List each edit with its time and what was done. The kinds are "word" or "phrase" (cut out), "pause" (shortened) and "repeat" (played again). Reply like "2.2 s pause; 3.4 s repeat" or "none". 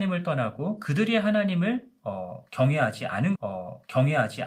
3.4 s repeat